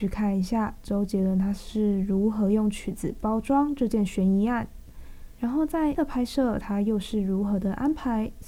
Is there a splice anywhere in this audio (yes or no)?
yes